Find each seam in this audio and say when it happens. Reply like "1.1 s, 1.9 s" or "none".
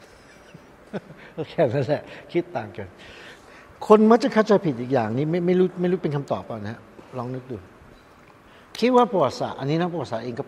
3.8 s